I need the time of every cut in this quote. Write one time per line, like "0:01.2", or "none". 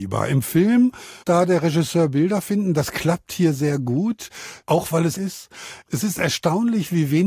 0:01.2
0:05.2

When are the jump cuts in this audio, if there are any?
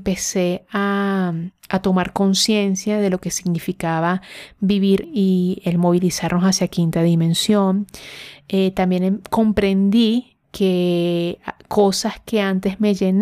0:05.0
0:10.4

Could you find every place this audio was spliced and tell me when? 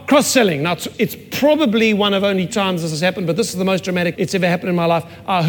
0:00.9
0:02.5
0:04.1

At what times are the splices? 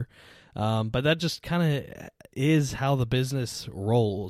none

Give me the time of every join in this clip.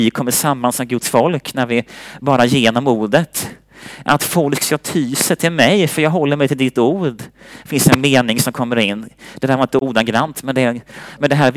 none

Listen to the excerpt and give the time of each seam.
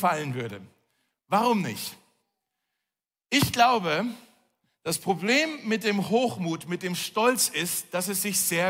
none

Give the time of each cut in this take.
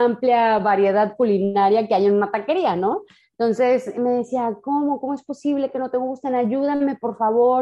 none

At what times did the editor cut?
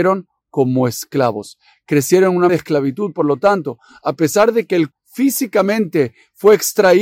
0:02.5
0:04.9

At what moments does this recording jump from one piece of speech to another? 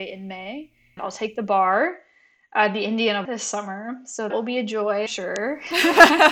0:01.0
0:03.2
0:04.3
0:05.1

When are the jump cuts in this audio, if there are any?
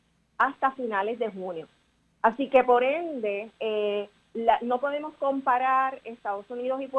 none

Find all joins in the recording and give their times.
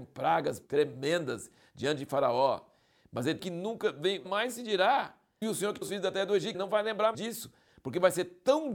0:03.4
0:04.2
0:05.4
0:05.8
0:06.5
0:07.1

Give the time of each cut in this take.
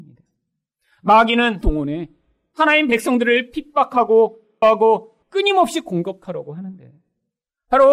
0:01.6
0:04.6
0:05.2

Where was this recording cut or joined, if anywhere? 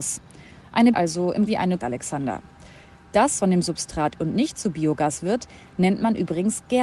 0:00.9
0:01.5
0:01.8
0:03.4
0:04.2

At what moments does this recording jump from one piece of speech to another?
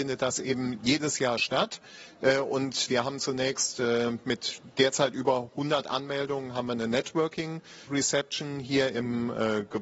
0:02.9
0:07.9

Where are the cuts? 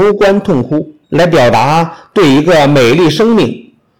0:01.0

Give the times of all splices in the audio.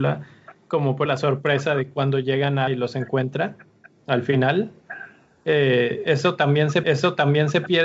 0:01.1
0:02.7
0:06.8

